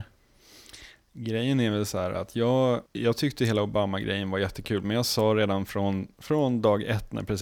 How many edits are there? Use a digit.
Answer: 1